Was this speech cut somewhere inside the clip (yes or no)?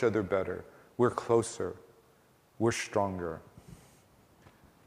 no